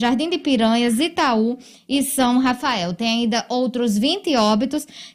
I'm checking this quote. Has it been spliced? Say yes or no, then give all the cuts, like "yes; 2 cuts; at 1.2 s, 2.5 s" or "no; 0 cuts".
no; 0 cuts